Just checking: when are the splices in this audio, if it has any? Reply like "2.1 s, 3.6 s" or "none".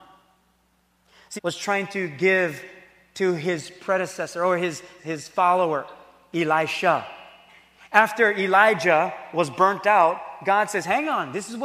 1.4 s, 5.0 s

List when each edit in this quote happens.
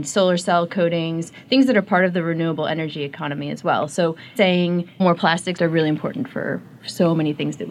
4.4 s, 5.0 s, 5.6 s

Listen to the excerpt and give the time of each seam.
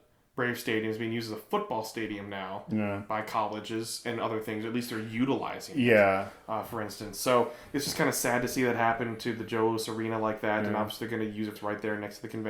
11.6 s

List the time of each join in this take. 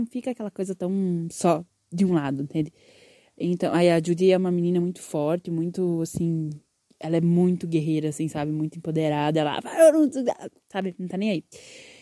none

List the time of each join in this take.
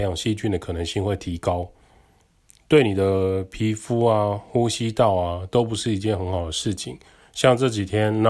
none

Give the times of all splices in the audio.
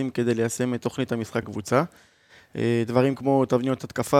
1.4 s

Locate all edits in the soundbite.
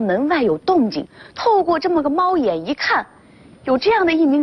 none

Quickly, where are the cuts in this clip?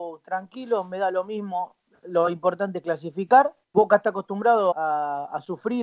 3.6 s, 4.7 s

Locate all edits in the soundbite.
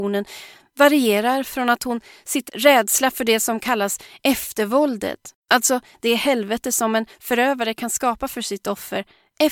2.5 s, 5.4 s

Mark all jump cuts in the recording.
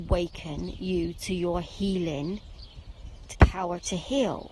3.3 s

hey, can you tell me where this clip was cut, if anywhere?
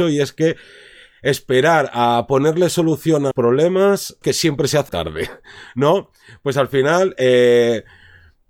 3.3 s, 4.2 s, 4.9 s

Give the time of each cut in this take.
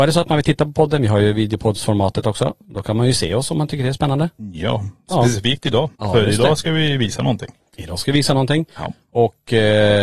6.0 s

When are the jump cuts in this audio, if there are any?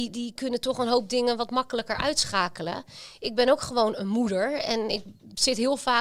none

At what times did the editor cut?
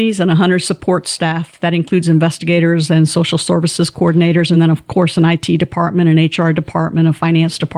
none

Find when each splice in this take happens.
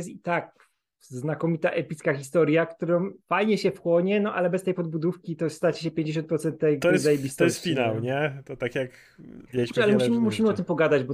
3.2 s, 9.5 s

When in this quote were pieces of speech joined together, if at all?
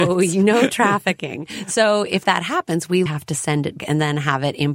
3.1 s, 3.8 s

